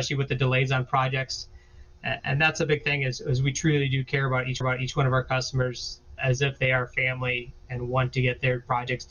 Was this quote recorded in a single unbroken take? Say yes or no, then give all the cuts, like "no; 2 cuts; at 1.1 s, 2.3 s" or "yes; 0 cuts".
no; 2 cuts; at 4.6 s, 6.2 s